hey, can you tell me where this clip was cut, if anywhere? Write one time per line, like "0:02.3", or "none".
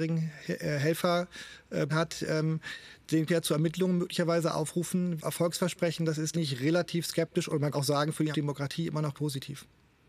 0:01.9
0:03.3
0:05.2
0:06.3
0:07.7
0:08.3
0:09.1